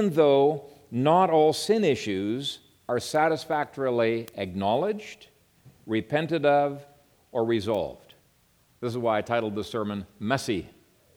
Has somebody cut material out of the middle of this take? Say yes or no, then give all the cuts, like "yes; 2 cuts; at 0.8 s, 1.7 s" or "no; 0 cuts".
no; 0 cuts